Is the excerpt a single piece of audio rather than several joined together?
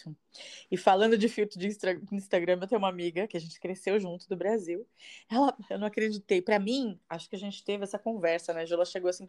yes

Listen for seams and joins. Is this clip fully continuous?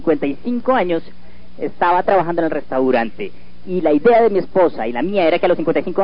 no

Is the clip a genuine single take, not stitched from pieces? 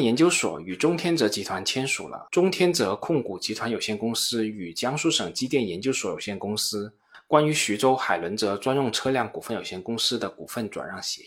no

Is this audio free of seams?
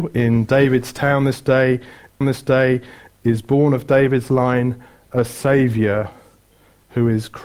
no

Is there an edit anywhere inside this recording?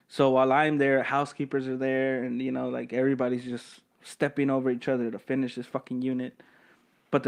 yes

